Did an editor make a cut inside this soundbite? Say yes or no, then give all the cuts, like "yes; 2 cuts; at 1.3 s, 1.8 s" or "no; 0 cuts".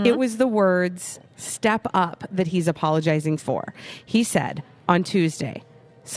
yes; 1 cut; at 3.4 s